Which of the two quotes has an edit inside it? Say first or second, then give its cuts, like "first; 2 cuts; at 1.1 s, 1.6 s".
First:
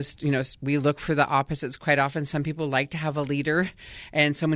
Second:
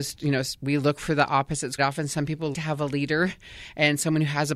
second; 2 cuts; at 1.8 s, 2.5 s